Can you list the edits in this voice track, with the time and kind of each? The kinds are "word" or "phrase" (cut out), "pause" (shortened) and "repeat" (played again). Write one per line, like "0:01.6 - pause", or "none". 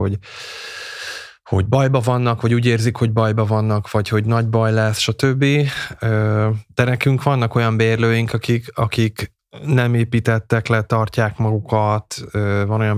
none